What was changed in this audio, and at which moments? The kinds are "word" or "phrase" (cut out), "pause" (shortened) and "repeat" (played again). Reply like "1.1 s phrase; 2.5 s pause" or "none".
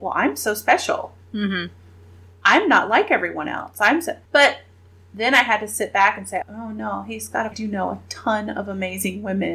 1.2 s pause; 4.2 s pause; 6.4 s word; 7.5 s phrase